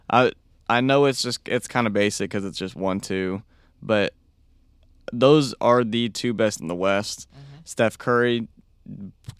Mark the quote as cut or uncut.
cut